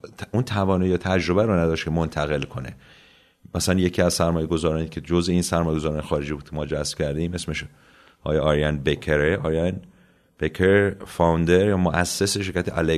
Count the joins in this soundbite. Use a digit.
0